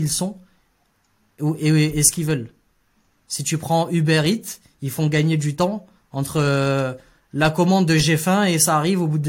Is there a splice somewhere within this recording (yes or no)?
no